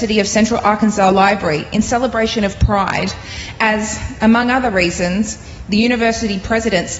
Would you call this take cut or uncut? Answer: uncut